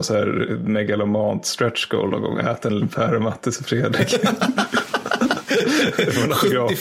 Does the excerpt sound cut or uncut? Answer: cut